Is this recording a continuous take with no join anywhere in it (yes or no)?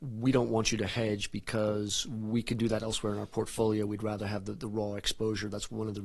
yes